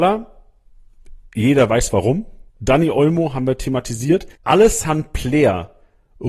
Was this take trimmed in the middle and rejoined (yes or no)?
yes